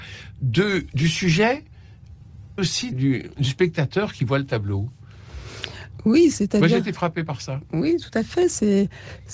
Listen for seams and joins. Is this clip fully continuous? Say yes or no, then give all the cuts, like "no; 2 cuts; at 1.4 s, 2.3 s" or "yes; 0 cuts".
no; 2 cuts; at 2.6 s, 2.9 s